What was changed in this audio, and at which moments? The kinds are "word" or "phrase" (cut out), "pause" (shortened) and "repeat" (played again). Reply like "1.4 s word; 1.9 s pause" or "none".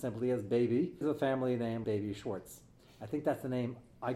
1.0 s word; 1.8 s word